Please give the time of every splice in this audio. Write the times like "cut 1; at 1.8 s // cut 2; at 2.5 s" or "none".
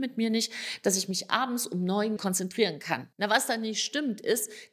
cut 1; at 2.2 s // cut 2; at 3.1 s